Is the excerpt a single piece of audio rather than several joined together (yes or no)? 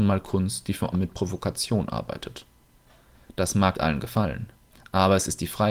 no